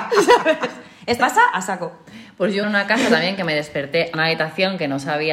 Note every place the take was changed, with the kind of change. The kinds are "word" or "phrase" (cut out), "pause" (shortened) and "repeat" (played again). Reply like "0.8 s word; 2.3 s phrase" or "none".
1.2 s word; 2.6 s phrase; 4.1 s phrase